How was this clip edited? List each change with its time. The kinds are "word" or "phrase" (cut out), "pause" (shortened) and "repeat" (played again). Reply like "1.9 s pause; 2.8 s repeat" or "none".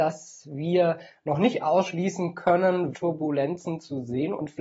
2.9 s word